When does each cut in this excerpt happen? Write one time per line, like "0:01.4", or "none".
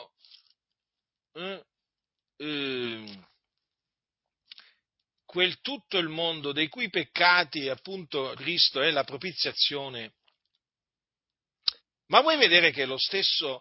0:08.4
0:11.8

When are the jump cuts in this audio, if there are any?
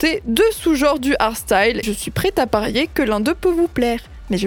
0:01.8

